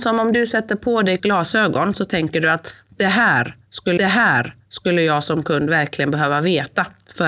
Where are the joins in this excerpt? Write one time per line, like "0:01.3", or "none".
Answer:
0:01.2
0:04.0